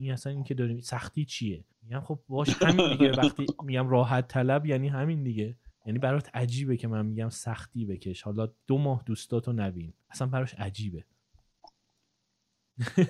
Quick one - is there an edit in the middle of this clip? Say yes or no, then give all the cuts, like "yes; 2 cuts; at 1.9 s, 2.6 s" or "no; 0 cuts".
yes; 3 cuts; at 1.7 s, 5.7 s, 10.0 s